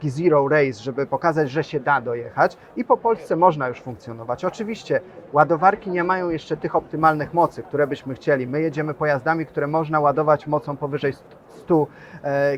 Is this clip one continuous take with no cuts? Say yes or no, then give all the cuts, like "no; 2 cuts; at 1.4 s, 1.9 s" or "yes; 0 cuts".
yes; 0 cuts